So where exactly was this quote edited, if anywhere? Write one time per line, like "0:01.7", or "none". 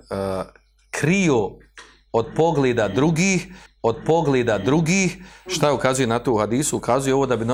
0:03.7